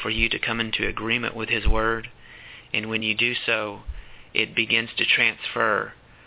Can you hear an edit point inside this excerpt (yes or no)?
no